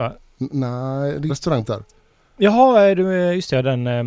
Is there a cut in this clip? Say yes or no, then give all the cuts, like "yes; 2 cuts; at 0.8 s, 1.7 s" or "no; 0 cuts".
yes; 2 cuts; at 1.3 s, 1.6 s